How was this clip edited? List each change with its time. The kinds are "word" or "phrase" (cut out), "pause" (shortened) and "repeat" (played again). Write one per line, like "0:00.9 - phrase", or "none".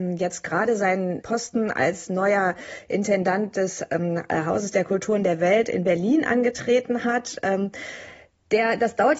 0:01.2 - word